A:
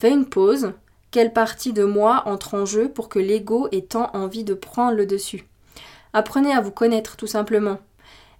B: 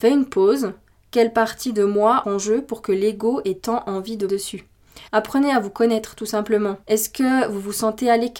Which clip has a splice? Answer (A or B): B